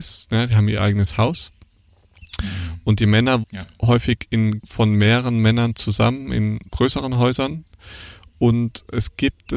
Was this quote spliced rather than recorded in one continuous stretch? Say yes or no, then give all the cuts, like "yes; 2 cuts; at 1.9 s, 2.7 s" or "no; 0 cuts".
yes; 3 cuts; at 3.4 s, 4.6 s, 6.7 s